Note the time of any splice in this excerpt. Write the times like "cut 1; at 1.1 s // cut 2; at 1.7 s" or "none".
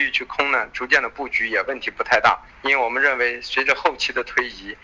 cut 1; at 2.5 s